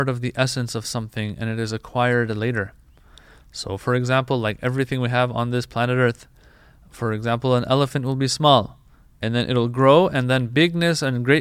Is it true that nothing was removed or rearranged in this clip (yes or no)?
yes